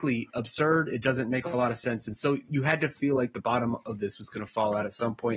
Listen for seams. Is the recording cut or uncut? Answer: uncut